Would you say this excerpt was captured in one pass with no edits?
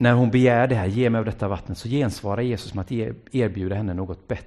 yes; 0 cuts

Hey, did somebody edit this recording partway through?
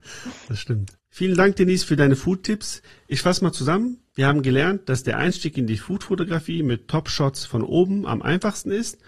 no; 0 cuts

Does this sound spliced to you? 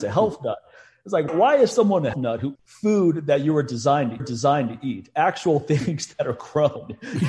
yes; 4 cuts; at 1.3 s, 2.1 s, 2.6 s, 4.2 s

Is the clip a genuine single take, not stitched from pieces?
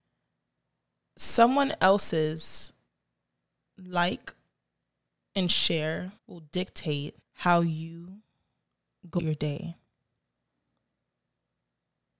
no; 3 cuts; at 6.2 s, 7.2 s, 9.2 s

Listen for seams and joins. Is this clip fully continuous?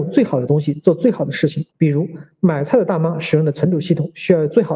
no; 1 cut; at 1.7 s

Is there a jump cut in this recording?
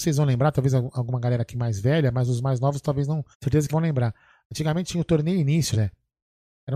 yes; 3 cuts; at 3.3 s, 3.7 s, 5.7 s

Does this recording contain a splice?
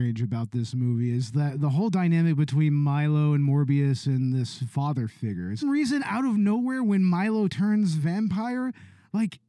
yes; 1 cut; at 5.6 s

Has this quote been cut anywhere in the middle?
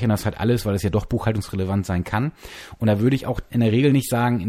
no; 0 cuts

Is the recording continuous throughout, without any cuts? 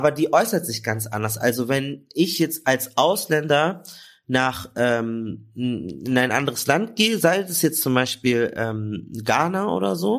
yes; 0 cuts

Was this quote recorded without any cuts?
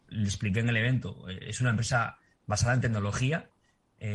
yes; 0 cuts

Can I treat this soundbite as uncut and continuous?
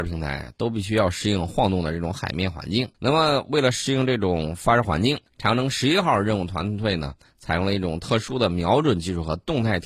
no; 2 cuts; at 2.9 s, 5.3 s

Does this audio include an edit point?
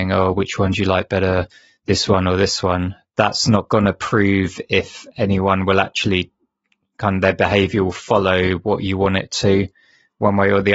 no; 0 cuts

